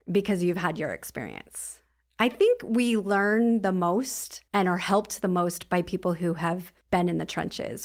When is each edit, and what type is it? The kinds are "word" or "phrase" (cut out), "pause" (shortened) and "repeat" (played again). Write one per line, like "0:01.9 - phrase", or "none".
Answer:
0:04.5 - pause